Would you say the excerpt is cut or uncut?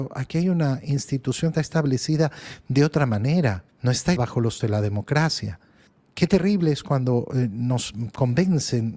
cut